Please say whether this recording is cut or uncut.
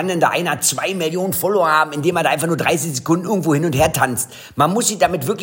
uncut